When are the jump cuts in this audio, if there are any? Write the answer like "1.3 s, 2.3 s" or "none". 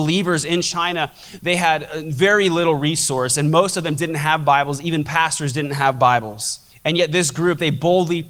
6.7 s

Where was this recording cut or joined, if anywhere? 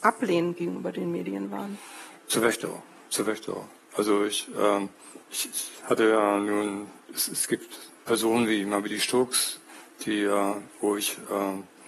5.2 s, 8.0 s

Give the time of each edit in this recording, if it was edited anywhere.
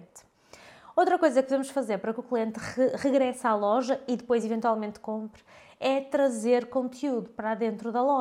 none

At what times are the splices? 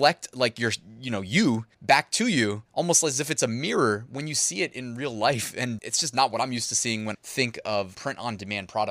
1.7 s, 2.7 s, 5.8 s, 7.1 s, 7.9 s

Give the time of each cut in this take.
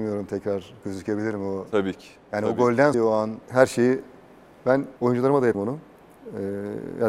2.9 s, 3.4 s, 5.0 s, 5.5 s

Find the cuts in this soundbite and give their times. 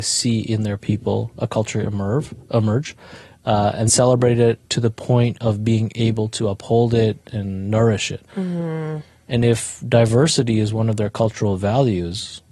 3.9 s, 4.7 s, 8.3 s

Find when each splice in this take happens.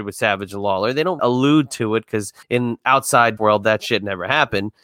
1.2 s, 2.4 s, 3.4 s

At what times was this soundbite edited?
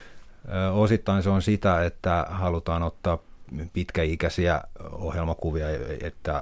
none

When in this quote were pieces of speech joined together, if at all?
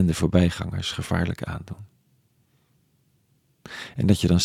none

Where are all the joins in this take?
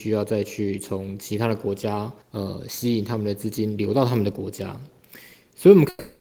2.2 s

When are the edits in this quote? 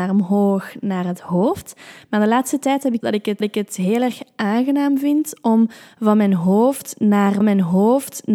3.0 s, 3.4 s, 7.4 s

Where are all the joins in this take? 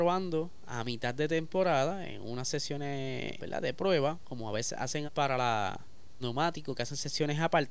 3.4 s, 5.0 s, 6.2 s

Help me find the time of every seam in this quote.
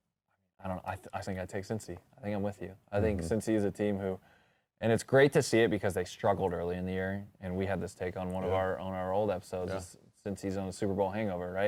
1.2 s

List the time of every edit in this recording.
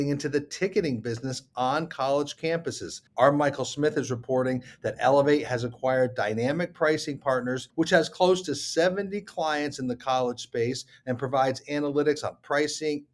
3.1 s, 7.7 s

